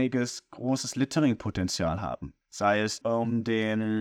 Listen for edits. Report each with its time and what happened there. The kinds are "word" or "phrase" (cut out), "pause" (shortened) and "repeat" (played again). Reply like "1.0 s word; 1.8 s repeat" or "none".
2.4 s pause; 3.0 s phrase